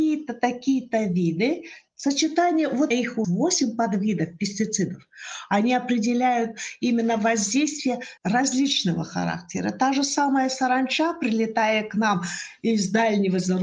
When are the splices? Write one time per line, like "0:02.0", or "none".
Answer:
0:02.9
0:03.2
0:08.2

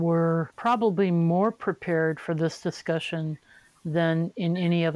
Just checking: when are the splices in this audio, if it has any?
none

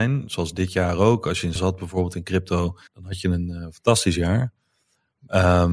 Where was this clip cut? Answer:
0:01.6
0:02.9

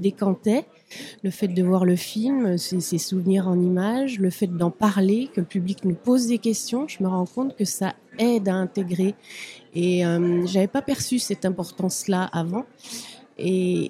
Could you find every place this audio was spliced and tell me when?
none

